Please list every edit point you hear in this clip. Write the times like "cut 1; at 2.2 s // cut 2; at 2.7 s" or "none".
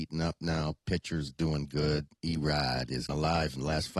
cut 1; at 1.3 s // cut 2; at 2.2 s // cut 3; at 3.1 s